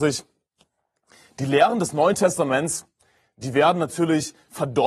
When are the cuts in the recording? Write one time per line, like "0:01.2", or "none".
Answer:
none